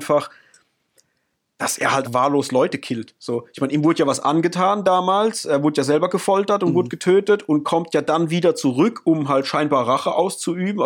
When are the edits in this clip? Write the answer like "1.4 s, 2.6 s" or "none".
2.0 s